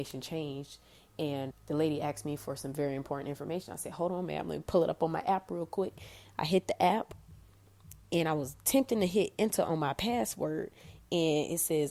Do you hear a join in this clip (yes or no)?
yes